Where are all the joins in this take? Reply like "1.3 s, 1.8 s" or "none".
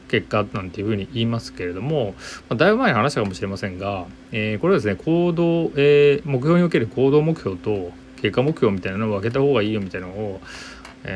none